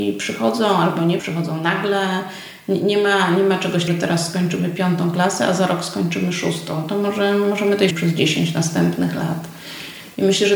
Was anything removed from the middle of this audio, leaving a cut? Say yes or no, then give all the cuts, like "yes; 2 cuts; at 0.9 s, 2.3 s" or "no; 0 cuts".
yes; 3 cuts; at 1.2 s, 3.9 s, 7.9 s